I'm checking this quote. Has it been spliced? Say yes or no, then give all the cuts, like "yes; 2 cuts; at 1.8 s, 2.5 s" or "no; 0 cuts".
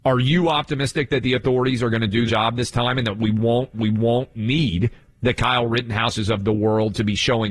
yes; 2 cuts; at 2.3 s, 3.7 s